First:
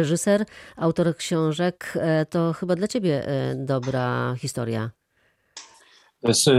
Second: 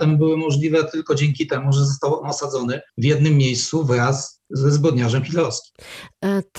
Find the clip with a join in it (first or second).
second